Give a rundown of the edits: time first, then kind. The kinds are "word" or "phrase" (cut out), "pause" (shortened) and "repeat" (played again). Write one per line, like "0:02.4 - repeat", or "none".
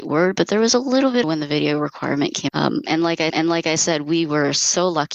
0:01.2 - phrase
0:02.5 - word
0:03.3 - repeat